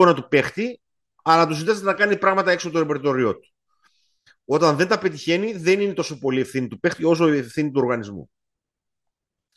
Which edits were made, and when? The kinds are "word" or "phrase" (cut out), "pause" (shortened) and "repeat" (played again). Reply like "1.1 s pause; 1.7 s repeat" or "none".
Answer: none